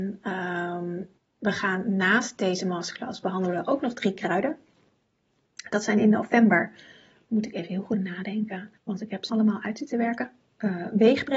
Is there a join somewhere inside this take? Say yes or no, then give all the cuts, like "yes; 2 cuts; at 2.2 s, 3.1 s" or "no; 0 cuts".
yes; 3 cuts; at 1.2 s, 8.8 s, 9.3 s